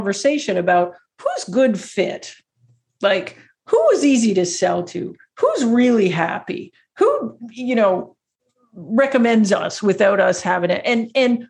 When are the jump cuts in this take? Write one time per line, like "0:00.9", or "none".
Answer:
none

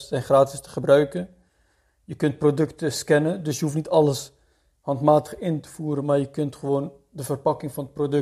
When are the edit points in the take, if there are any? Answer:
none

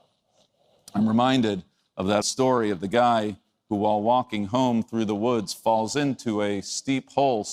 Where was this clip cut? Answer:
0:02.2

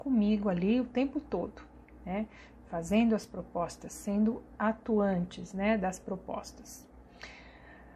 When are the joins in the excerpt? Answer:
none

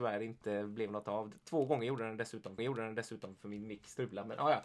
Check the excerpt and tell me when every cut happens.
0:02.6

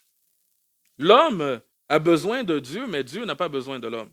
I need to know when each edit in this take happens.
0:01.7

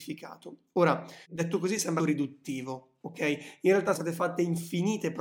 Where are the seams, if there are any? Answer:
0:01.2
0:02.0
0:03.9

